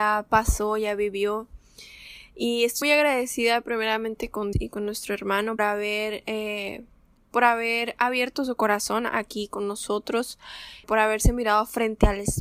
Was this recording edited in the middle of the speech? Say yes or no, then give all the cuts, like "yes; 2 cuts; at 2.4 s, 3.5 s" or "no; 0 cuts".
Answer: yes; 4 cuts; at 2.8 s, 4.5 s, 5.6 s, 10.8 s